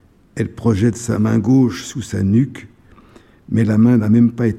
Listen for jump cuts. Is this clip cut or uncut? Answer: uncut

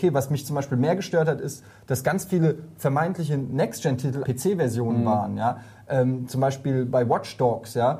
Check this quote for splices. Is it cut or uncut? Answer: cut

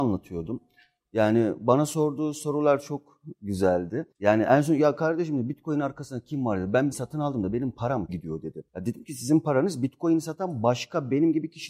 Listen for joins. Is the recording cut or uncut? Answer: cut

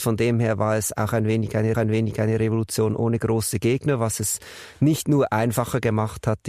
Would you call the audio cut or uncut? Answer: cut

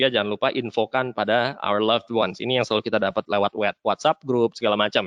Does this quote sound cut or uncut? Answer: uncut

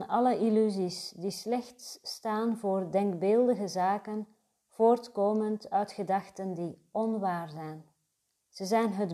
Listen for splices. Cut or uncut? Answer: uncut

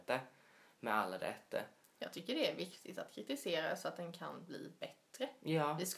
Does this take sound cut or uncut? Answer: uncut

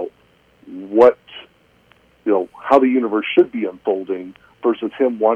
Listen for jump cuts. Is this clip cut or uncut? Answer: uncut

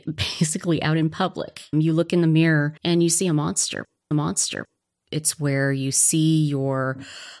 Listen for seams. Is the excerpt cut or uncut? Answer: cut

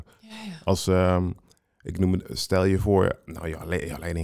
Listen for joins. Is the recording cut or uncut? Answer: uncut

